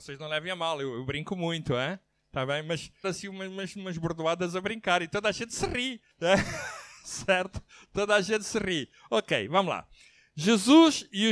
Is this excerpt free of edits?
no; 2 cuts; at 3.0 s, 6.1 s

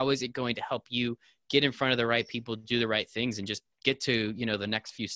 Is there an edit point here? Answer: no; 0 cuts

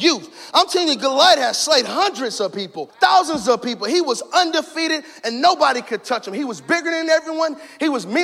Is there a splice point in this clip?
yes; 1 cut; at 2.9 s

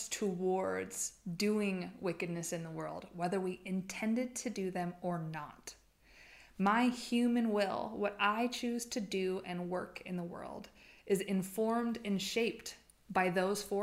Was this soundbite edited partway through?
no; 0 cuts

